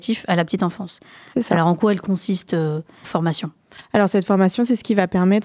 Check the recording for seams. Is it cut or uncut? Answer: cut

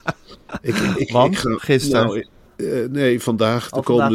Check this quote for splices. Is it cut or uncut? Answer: uncut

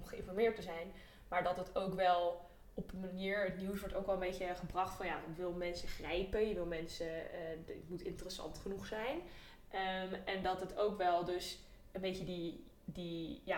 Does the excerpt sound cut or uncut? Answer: uncut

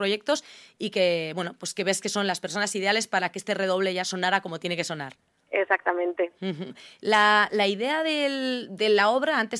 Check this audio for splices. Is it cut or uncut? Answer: uncut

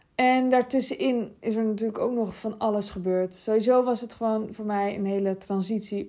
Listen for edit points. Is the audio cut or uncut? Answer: uncut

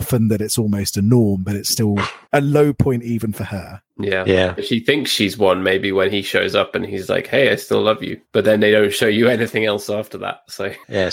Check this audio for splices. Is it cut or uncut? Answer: cut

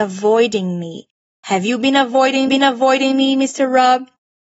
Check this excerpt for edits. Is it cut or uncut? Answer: cut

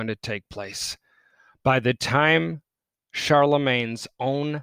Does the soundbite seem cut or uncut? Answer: uncut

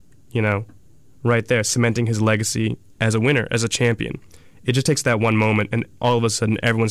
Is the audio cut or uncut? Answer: uncut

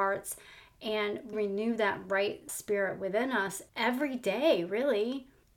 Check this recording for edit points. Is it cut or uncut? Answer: cut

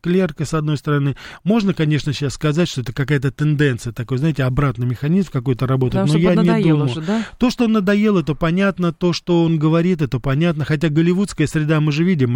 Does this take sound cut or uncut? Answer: uncut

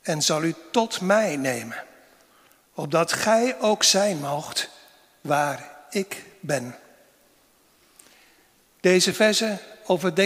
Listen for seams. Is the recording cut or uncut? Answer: uncut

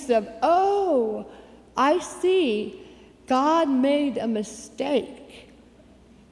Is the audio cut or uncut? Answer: uncut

